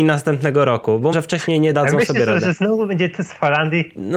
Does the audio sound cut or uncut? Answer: cut